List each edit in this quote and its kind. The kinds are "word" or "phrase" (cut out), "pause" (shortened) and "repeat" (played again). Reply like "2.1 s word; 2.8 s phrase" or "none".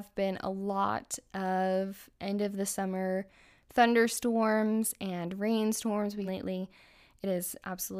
6.2 s phrase

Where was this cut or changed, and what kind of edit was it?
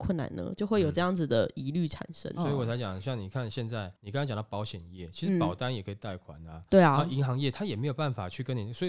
4.0 s pause

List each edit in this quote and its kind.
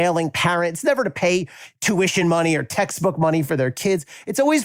none

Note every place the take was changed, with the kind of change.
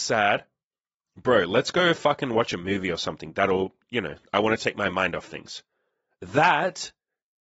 none

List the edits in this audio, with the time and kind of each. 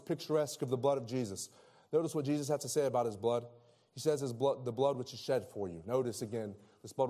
none

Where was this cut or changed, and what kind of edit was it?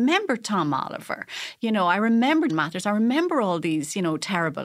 2.5 s word

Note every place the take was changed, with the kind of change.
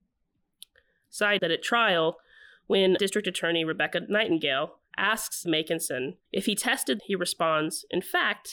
1.4 s word; 3.0 s word; 5.4 s word; 6.2 s pause; 7.0 s phrase

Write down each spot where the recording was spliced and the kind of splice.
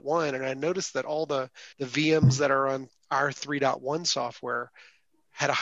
1.7 s pause

